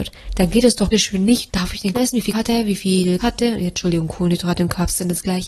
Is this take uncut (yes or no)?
no